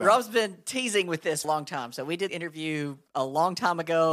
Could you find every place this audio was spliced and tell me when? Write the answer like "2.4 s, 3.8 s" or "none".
1.4 s, 2.3 s, 3.1 s